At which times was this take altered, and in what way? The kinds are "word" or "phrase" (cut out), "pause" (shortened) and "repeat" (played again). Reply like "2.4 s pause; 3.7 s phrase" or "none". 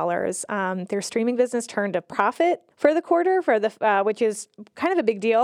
2.7 s pause

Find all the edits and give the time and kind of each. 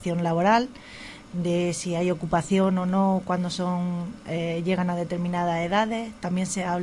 none

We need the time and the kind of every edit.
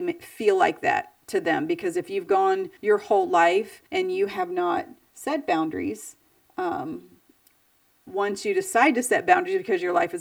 2.8 s pause; 3.9 s pause

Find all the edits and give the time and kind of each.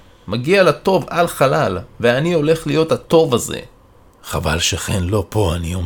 none

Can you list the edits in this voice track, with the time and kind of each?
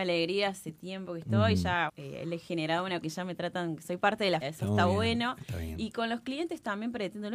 1.9 s word; 3.0 s word; 4.4 s word

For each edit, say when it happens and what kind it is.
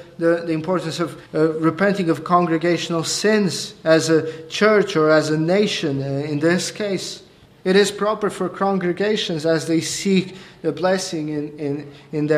1.3 s pause; 7.5 s pause

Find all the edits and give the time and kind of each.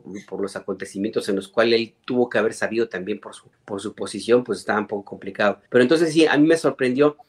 3.5 s pause; 5.7 s pause

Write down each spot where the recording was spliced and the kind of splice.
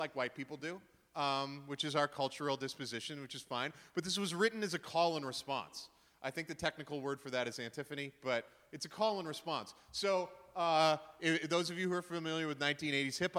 none

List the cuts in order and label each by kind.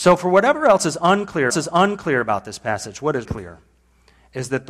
1.5 s repeat; 3.2 s word

